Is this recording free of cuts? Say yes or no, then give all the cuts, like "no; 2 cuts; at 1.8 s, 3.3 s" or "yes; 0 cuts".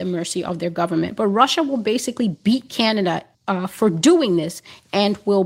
no; 1 cut; at 3.3 s